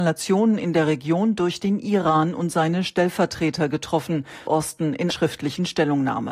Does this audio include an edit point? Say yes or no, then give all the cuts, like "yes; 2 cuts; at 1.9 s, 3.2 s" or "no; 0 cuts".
yes; 2 cuts; at 4.5 s, 5.1 s